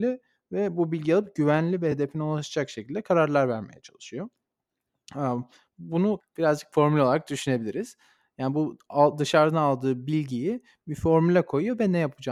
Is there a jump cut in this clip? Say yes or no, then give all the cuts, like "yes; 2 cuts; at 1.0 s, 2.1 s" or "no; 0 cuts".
no; 0 cuts